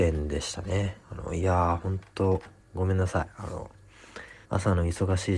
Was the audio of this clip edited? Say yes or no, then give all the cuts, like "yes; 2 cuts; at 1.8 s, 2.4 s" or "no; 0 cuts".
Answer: yes; 2 cuts; at 1.0 s, 4.4 s